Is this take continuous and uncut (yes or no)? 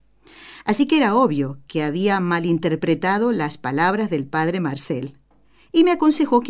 yes